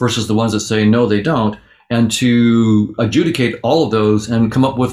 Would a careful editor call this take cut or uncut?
uncut